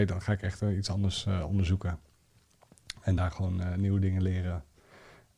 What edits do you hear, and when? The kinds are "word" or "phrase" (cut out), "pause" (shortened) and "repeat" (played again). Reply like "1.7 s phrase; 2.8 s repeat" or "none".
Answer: none